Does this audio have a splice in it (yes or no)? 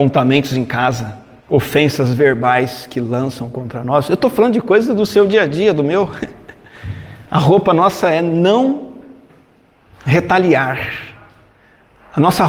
yes